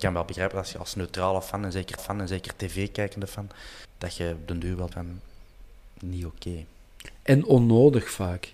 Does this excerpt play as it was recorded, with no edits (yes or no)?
no